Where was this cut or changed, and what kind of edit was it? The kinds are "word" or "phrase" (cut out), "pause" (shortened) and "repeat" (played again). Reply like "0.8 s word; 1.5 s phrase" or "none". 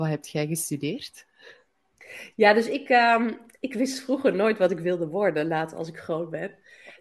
none